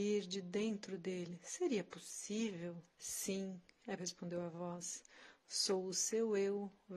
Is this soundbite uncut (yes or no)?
no